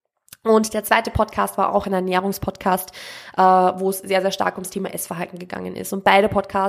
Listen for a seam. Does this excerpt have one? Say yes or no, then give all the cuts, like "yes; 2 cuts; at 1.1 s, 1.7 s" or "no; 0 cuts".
no; 0 cuts